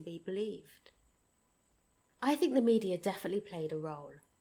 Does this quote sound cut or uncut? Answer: uncut